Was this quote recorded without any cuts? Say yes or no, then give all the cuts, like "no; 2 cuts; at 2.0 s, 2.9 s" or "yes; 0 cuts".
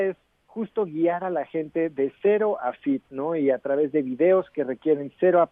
yes; 0 cuts